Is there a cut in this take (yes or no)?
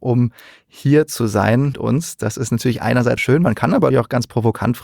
yes